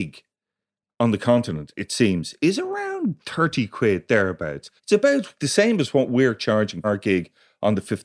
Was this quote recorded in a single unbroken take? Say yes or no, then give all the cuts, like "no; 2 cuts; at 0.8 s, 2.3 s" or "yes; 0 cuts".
no; 2 cuts; at 4.8 s, 6.8 s